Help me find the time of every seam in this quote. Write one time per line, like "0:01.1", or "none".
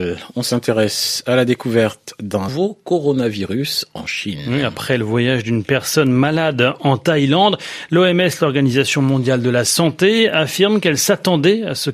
0:02.5